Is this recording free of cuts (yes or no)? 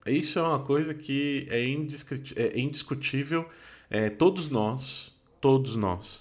yes